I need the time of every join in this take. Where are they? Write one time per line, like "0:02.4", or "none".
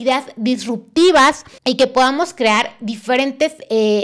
0:01.6